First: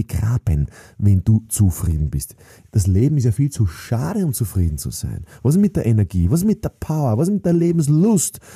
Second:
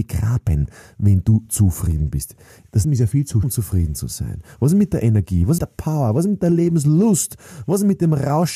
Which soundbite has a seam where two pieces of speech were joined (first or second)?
second